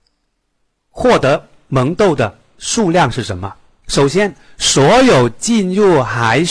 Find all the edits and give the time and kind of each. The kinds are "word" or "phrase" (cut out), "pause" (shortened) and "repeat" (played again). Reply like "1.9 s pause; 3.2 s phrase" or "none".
none

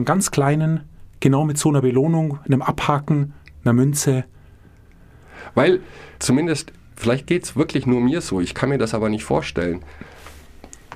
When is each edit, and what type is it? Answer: 6.1 s pause

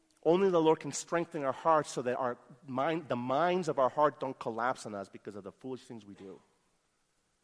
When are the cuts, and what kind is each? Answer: none

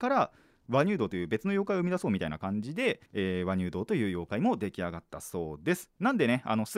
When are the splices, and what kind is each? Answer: 3.1 s pause

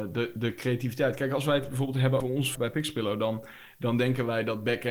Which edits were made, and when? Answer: 2.2 s word; 2.5 s word

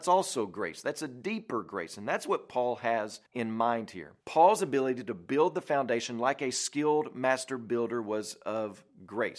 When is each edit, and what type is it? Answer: 3.3 s pause; 4.2 s pause

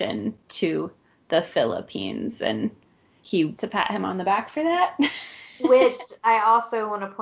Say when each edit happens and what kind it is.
3.6 s phrase

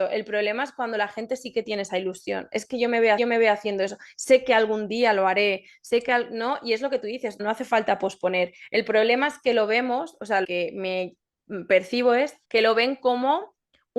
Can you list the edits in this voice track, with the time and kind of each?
3.2 s repeat; 7.4 s word; 10.4 s phrase; 12.4 s pause

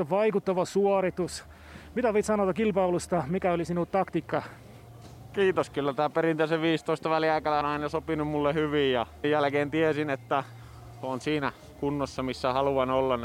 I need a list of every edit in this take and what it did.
7.6 s word; 9.2 s word

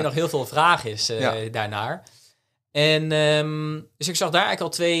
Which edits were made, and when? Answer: none

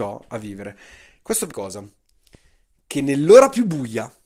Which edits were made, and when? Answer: 1.5 s phrase

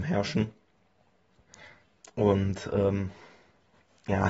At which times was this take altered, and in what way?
none

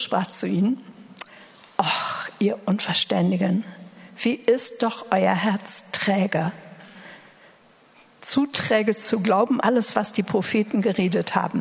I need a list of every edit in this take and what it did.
9.6 s word

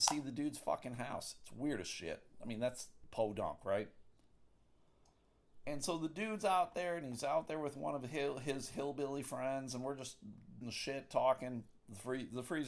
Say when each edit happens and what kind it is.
10.6 s word

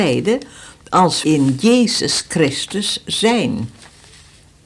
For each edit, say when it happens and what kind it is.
1.2 s word

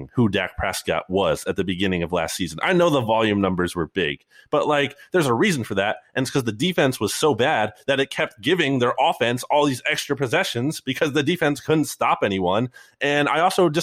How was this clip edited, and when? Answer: none

